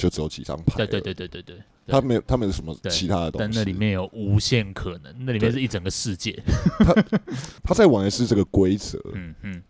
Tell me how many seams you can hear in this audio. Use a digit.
2